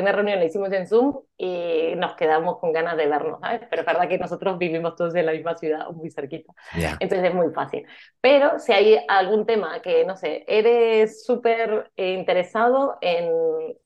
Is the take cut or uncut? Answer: uncut